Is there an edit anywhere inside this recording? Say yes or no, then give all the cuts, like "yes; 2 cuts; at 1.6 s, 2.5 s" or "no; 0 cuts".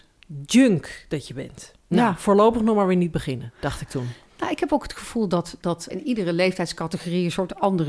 yes; 2 cuts; at 1.8 s, 5.9 s